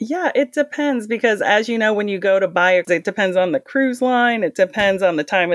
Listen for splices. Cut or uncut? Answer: cut